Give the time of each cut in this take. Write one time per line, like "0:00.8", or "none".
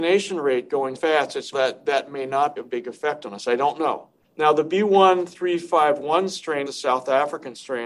0:01.0
0:01.5
0:02.6
0:04.2
0:06.7